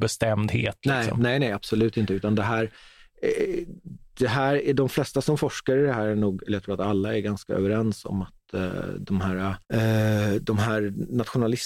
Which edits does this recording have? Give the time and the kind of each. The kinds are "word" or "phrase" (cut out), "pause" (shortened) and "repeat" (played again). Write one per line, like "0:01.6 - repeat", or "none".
0:09.6 - pause